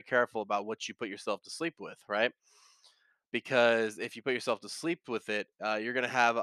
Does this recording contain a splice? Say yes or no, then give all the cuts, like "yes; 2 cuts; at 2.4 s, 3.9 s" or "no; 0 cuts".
no; 0 cuts